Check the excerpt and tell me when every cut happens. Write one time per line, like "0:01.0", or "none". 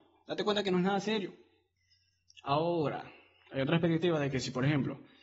0:01.8